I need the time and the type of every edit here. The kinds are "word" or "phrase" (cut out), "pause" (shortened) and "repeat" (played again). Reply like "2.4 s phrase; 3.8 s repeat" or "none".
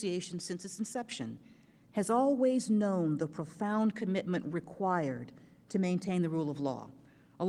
none